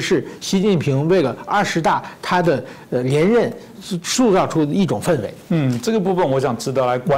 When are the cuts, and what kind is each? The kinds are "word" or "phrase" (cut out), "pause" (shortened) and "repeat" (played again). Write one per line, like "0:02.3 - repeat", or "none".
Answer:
0:05.4 - pause